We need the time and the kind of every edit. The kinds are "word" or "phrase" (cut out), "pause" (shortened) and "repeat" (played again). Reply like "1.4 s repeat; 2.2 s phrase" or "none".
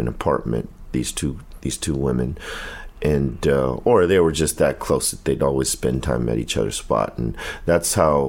none